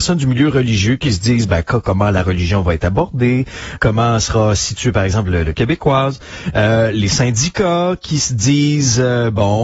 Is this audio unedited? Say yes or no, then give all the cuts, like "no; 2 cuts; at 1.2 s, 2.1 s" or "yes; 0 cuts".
no; 2 cuts; at 3.8 s, 5.5 s